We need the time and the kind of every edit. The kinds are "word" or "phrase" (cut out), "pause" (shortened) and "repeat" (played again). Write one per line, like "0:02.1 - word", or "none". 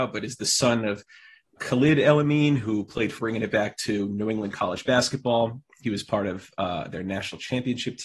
0:01.6 - word
0:03.2 - word